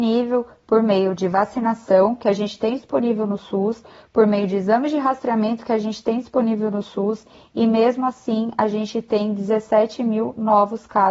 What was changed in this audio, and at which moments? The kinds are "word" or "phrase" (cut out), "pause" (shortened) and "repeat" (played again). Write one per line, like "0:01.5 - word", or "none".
none